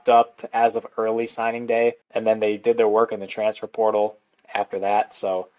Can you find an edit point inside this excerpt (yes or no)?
yes